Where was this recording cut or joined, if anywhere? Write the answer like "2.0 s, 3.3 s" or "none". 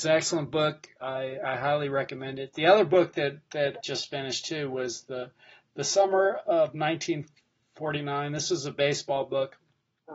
3.8 s